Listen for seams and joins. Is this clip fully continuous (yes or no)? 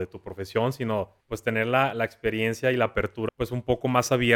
no